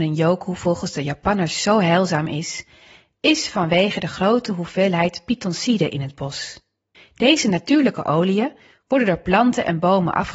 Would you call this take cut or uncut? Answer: cut